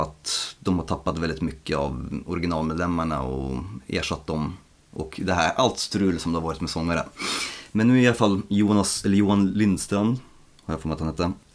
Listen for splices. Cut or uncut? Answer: uncut